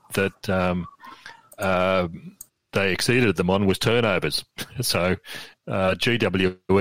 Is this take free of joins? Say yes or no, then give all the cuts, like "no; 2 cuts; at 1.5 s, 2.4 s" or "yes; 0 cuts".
no; 1 cut; at 2.7 s